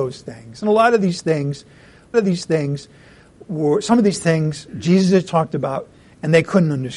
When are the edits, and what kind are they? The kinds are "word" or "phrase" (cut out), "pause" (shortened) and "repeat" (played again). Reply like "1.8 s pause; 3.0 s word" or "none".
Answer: 2.1 s repeat